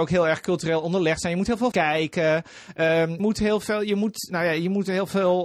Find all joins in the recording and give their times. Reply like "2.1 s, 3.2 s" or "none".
1.7 s, 3.2 s, 4.3 s